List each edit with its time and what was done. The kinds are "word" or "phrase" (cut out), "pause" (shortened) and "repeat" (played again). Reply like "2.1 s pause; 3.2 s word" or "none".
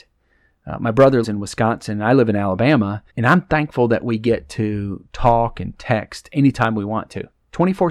1.2 s word; 3.1 s pause